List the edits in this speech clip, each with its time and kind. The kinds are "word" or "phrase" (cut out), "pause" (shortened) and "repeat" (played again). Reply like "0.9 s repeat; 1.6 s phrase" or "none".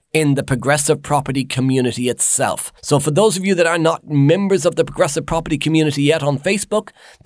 2.8 s pause